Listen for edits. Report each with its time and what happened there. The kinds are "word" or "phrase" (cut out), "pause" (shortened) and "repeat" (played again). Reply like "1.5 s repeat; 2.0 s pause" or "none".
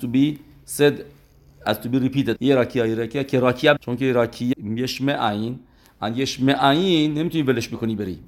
2.4 s phrase; 3.8 s word; 4.5 s word